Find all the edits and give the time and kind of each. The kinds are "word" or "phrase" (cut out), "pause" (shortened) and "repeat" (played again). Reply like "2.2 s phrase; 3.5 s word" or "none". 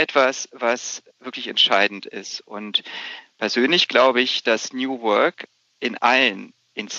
1.1 s pause

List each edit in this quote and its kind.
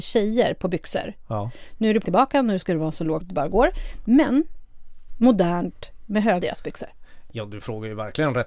2.0 s word; 3.2 s word; 5.1 s phrase; 6.4 s phrase

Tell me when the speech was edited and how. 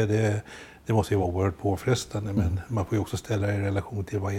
none

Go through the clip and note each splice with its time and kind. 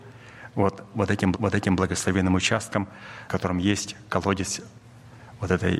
1.3 s repeat; 3.3 s word

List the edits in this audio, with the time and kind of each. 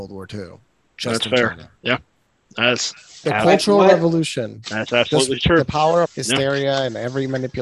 1.8 s pause; 3.2 s word; 6.0 s phrase

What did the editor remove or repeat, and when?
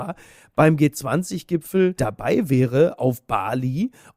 none

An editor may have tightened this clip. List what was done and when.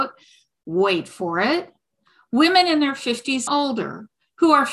3.5 s word

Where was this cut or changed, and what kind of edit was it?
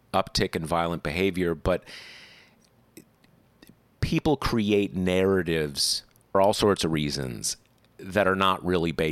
6.3 s word

